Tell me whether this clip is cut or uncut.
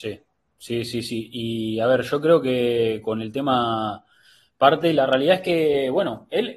uncut